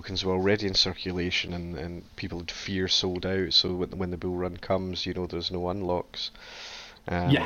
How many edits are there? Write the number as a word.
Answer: zero